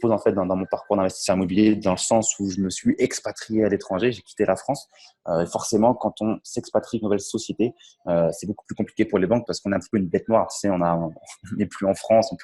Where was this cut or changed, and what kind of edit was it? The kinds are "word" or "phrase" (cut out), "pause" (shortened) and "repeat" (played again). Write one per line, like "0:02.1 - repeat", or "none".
0:07.0 - phrase

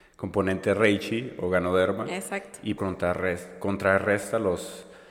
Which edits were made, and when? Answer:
0:02.8 - phrase

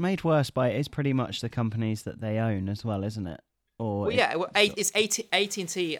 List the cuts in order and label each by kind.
none

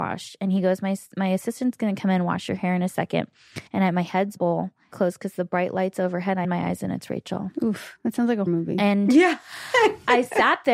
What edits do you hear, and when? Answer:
0:03.7 - pause
0:04.4 - phrase
0:04.9 - phrase
0:06.4 - word
0:08.5 - word

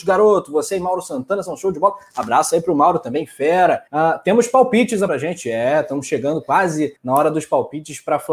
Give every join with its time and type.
0:03.9 - pause
0:05.1 - phrase
0:07.0 - pause

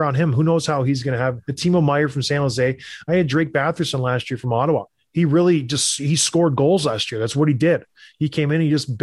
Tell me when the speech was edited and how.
none

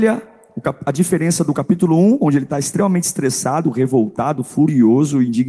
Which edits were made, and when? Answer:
none

